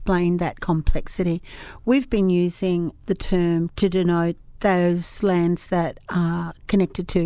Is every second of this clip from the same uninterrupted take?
no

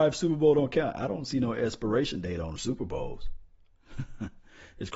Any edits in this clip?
no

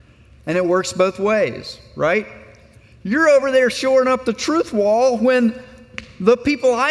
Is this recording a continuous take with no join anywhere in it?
yes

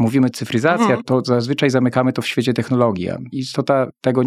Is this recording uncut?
yes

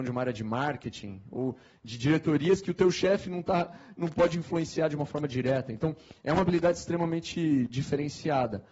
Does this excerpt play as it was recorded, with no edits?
yes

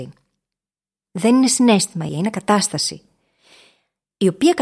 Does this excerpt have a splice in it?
yes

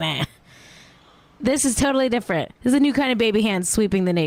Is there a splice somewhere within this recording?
yes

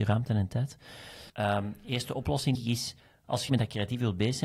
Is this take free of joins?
no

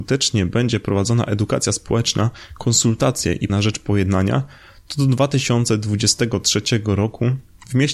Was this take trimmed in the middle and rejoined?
yes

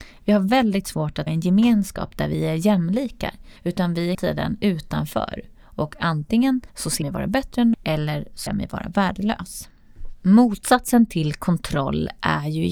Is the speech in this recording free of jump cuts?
no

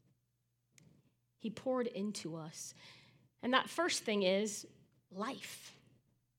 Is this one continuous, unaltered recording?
yes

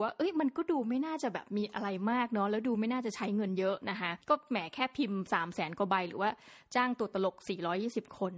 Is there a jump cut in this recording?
yes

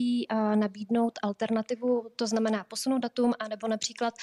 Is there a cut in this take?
no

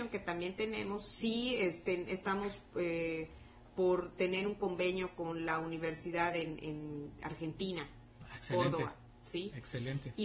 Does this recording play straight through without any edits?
yes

